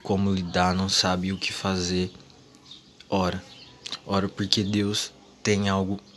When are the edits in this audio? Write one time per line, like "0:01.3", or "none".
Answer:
none

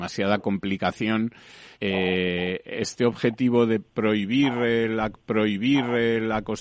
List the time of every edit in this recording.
0:01.7
0:05.1

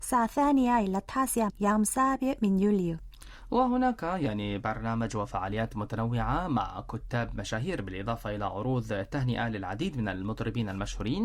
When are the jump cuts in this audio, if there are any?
0:01.5

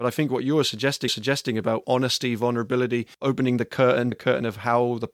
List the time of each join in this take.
0:01.1
0:03.1
0:04.1

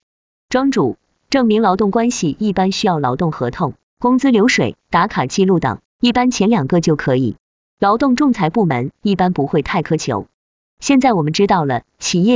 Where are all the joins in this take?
0:04.8

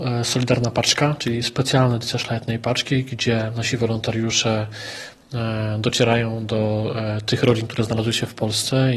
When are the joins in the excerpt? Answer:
none

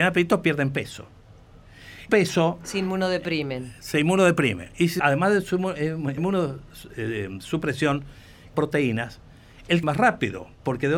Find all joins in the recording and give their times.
0:02.1
0:05.0
0:06.2
0:08.5
0:09.8

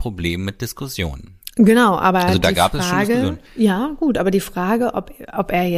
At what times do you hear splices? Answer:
0:03.5

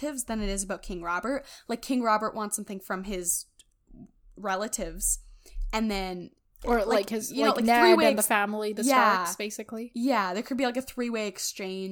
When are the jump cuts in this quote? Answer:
none

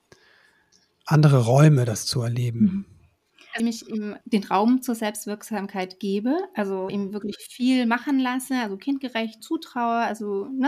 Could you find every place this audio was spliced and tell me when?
0:03.6
0:04.2
0:06.9
0:09.4

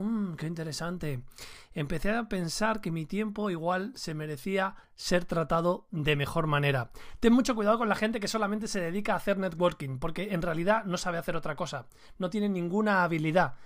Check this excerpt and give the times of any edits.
0:04.8

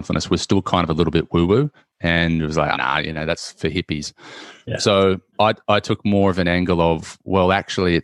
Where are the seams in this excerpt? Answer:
0:02.7
0:05.3

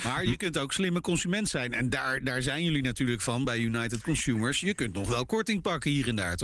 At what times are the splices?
none

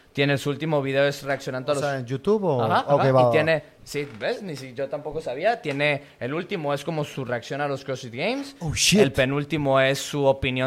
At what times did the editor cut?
none

